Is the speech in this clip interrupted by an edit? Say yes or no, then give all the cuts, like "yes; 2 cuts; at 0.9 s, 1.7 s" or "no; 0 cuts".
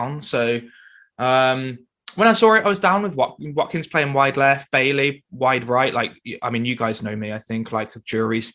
no; 0 cuts